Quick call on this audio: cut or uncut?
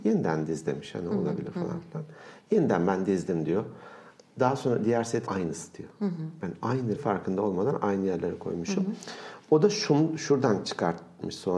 cut